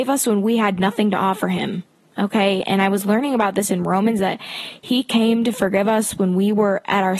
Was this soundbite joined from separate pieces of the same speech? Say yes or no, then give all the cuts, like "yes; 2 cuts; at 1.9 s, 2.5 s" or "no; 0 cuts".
no; 0 cuts